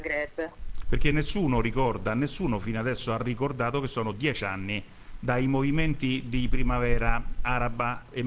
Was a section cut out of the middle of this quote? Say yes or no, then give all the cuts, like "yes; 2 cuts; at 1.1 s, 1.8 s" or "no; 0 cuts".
no; 0 cuts